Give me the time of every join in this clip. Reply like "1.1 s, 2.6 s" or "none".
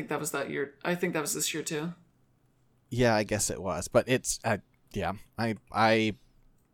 none